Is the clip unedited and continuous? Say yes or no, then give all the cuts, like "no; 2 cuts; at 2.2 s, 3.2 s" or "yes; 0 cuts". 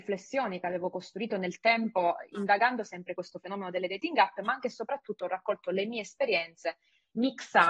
no; 1 cut; at 3.2 s